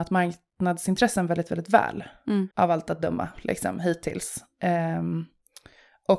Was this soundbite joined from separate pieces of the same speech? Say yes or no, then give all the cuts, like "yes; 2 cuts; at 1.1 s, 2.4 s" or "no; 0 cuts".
yes; 1 cut; at 2.5 s